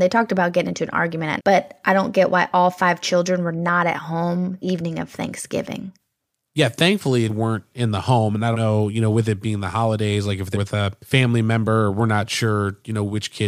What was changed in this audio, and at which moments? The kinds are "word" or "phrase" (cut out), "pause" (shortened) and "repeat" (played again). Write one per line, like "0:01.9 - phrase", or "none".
0:01.4 - word
0:04.6 - word
0:07.3 - word
0:08.5 - word
0:10.5 - word